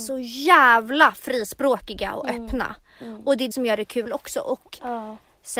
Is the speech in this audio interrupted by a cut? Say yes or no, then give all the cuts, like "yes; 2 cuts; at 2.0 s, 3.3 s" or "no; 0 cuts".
yes; 1 cut; at 3.5 s